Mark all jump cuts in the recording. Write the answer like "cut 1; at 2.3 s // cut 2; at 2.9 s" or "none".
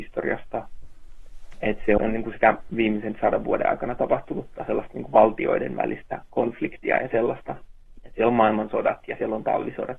cut 1; at 2.7 s

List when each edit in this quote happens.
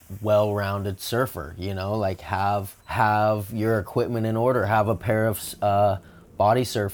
cut 1; at 2.8 s

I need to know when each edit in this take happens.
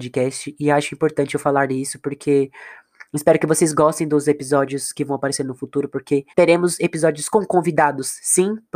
cut 1; at 6.3 s

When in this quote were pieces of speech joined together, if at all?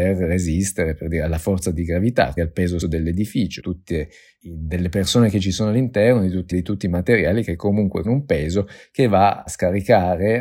cut 1; at 2.4 s // cut 2; at 2.8 s // cut 3; at 3.6 s // cut 4; at 6.5 s // cut 5; at 8.0 s // cut 6; at 9.5 s

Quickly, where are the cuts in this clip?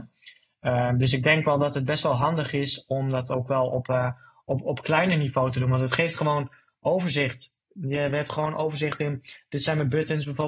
none

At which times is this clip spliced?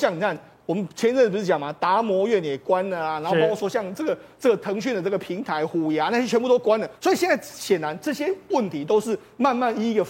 cut 1; at 7.0 s

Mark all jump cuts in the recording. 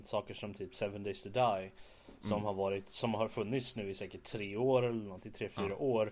none

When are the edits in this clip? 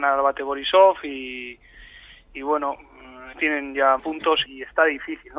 cut 1; at 3.3 s // cut 2; at 4.0 s // cut 3; at 4.4 s

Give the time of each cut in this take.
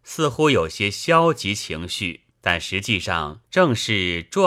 cut 1; at 2.3 s // cut 2; at 3.4 s

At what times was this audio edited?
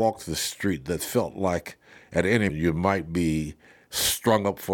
cut 1; at 2.5 s

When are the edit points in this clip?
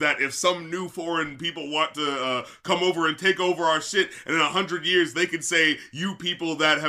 none

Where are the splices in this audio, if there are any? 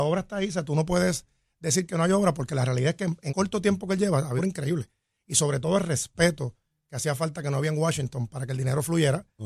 cut 1; at 3.3 s // cut 2; at 4.4 s

